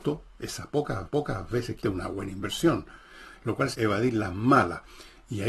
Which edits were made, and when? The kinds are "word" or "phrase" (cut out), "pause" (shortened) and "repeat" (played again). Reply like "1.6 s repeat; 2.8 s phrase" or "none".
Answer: 1.1 s repeat; 1.8 s word; 3.7 s phrase